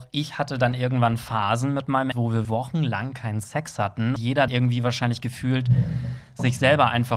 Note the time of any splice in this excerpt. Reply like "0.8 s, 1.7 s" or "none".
2.1 s, 2.4 s, 4.2 s, 4.5 s